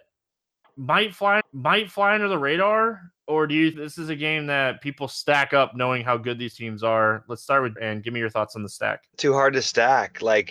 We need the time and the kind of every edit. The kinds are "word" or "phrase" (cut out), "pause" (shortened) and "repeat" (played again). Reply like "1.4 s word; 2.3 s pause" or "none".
1.4 s repeat; 3.2 s pause; 3.7 s word; 6.5 s word; 7.8 s word; 9.1 s pause